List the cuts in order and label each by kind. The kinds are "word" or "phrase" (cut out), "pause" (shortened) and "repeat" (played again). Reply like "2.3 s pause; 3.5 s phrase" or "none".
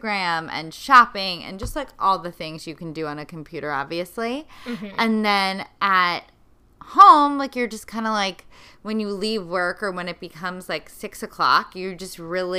none